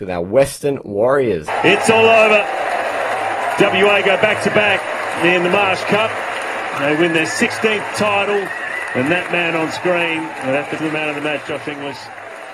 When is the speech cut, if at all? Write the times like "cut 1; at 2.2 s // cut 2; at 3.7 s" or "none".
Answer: cut 1; at 10.8 s